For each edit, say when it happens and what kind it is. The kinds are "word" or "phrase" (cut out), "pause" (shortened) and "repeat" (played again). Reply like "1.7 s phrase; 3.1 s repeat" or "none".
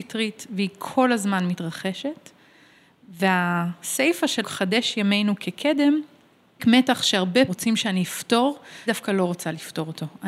4.4 s word; 6.6 s word; 7.5 s word; 8.9 s word